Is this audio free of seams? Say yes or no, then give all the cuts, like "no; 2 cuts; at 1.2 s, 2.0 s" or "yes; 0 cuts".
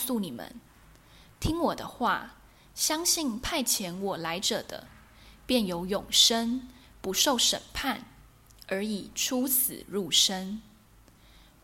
yes; 0 cuts